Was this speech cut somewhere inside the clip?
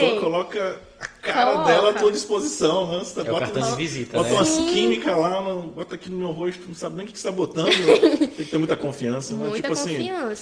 no; 0 cuts

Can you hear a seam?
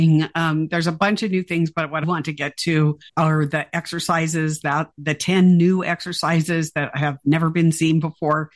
yes; 2 cuts; at 2.0 s, 3.1 s

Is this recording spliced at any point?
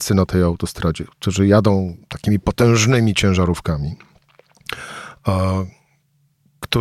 no; 0 cuts

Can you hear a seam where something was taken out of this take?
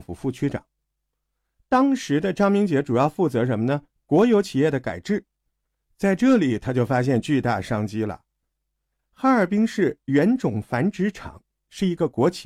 no; 0 cuts

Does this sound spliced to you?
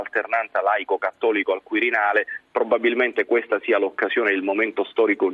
no; 0 cuts

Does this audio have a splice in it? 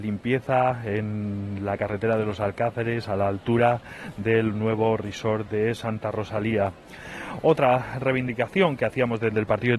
no; 0 cuts

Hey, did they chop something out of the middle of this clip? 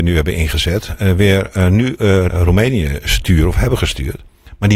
yes; 1 cut; at 2.3 s

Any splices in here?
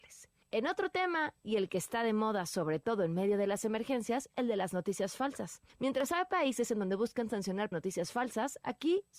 yes; 1 cut; at 7.7 s

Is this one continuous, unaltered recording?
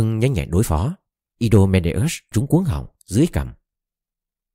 no; 1 cut; at 2.3 s

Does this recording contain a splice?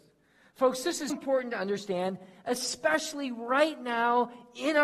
yes; 1 cut; at 1.1 s

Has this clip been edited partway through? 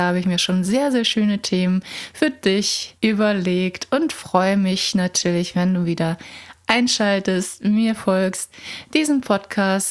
yes; 1 cut; at 3.0 s

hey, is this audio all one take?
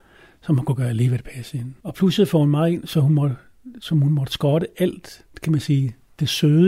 no; 1 cut; at 1.8 s

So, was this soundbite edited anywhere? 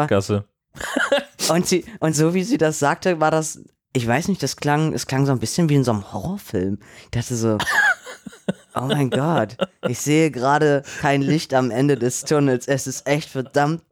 no; 0 cuts

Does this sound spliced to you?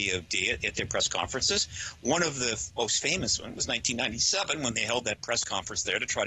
no; 0 cuts

